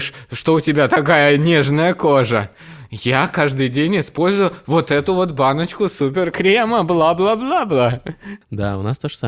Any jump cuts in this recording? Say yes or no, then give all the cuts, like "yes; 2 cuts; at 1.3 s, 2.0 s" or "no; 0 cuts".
yes; 1 cut; at 6.3 s